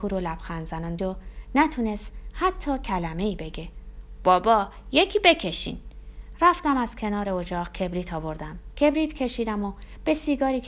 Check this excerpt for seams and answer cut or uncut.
cut